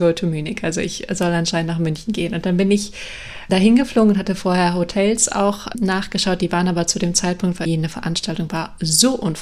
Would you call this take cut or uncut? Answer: cut